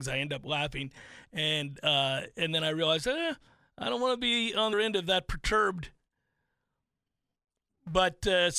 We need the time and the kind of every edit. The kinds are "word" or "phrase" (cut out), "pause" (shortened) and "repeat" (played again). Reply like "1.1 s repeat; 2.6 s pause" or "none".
4.7 s word